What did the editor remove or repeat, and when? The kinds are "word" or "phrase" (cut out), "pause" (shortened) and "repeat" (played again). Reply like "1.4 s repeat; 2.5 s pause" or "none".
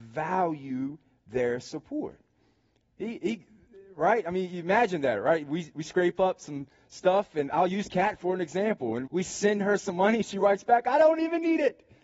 9.1 s word